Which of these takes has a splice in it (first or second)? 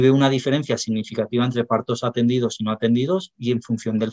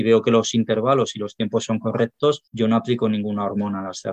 second